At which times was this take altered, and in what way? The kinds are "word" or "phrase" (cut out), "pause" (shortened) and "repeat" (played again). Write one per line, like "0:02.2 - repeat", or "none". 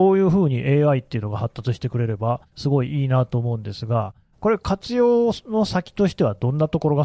0:02.5 - pause